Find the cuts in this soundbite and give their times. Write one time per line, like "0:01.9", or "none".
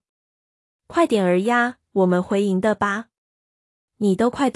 none